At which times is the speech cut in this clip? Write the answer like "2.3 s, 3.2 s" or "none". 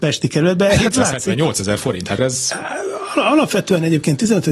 2.2 s